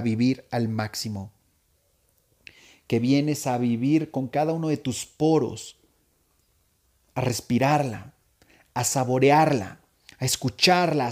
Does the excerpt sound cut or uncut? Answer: uncut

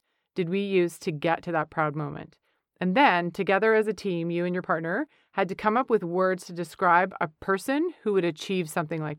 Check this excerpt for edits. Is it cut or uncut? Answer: uncut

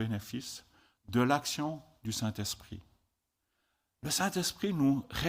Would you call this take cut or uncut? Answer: uncut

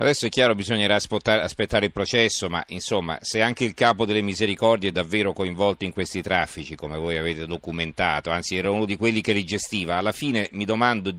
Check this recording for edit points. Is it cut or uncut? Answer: uncut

